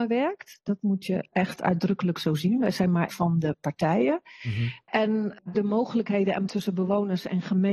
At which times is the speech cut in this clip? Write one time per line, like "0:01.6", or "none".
0:01.3
0:03.1
0:05.5
0:06.5